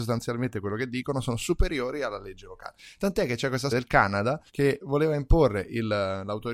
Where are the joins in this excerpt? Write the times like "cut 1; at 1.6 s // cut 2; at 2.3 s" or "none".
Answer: cut 1; at 3.7 s // cut 2; at 4.5 s